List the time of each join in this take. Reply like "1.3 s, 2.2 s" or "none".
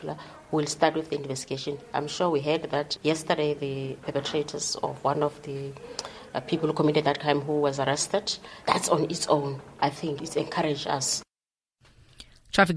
3.0 s